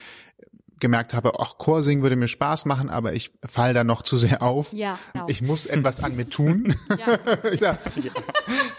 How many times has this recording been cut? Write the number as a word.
two